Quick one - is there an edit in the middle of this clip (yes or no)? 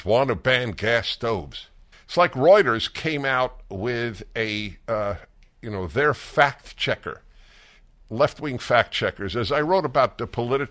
yes